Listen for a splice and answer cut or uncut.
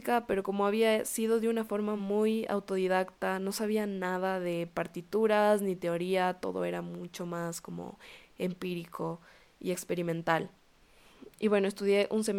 uncut